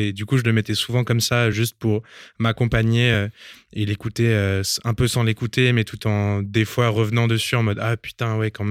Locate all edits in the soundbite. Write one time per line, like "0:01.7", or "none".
none